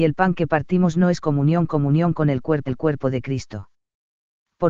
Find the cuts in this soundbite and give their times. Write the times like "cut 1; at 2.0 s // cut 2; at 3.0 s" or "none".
cut 1; at 1.7 s // cut 2; at 2.7 s

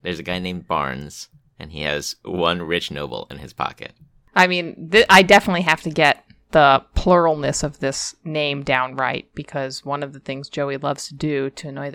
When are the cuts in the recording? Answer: none

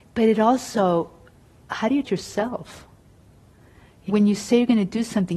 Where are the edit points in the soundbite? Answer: cut 1; at 2.0 s // cut 2; at 4.1 s

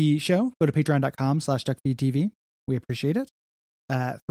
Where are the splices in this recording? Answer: none

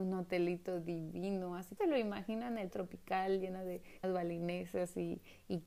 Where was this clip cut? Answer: cut 1; at 1.8 s // cut 2; at 2.7 s // cut 3; at 4.0 s

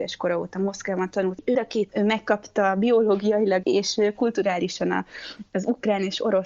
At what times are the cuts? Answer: cut 1; at 1.5 s // cut 2; at 1.9 s // cut 3; at 3.6 s

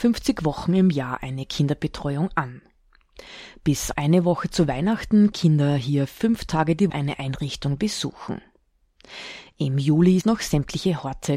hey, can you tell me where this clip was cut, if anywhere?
cut 1; at 3.9 s // cut 2; at 5.3 s // cut 3; at 6.9 s // cut 4; at 10.2 s

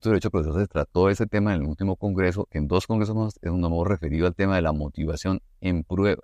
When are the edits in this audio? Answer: cut 1; at 2.5 s

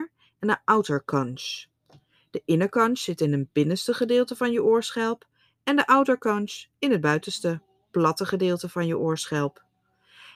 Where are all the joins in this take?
none

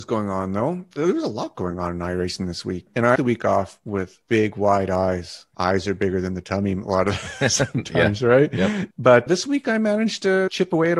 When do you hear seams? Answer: cut 1; at 3.2 s // cut 2; at 9.3 s

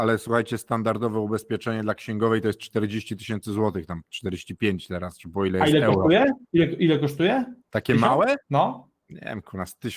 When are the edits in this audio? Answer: cut 1; at 7.6 s // cut 2; at 8.4 s

